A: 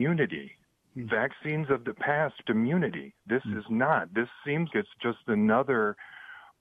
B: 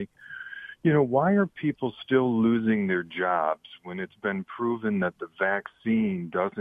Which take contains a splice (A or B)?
A